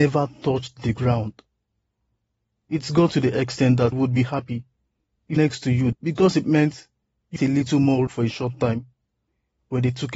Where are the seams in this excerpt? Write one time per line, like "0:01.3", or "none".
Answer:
0:03.9
0:05.4
0:05.9
0:07.4
0:08.1